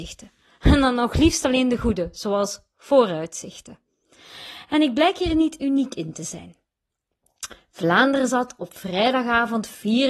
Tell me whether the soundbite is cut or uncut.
uncut